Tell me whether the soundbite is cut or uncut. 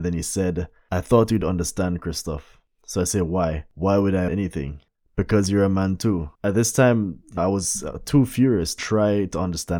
cut